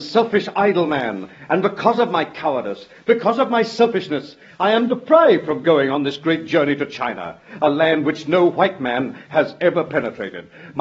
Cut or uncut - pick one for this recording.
uncut